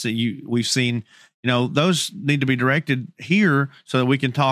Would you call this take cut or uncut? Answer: uncut